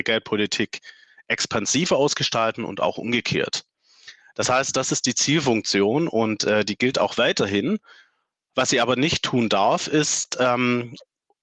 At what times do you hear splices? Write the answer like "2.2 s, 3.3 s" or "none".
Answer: none